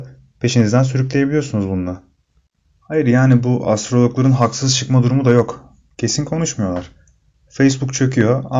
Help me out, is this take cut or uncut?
uncut